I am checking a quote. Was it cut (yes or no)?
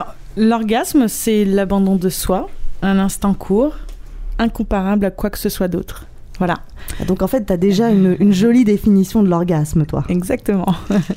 no